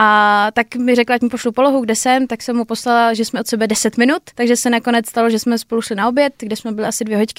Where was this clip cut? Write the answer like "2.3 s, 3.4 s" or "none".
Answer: 4.3 s